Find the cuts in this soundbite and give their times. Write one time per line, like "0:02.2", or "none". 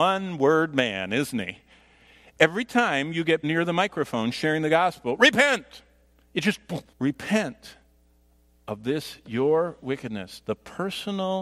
0:03.4
0:06.9